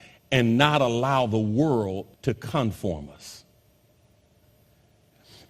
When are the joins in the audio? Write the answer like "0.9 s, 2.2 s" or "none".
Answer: 2.1 s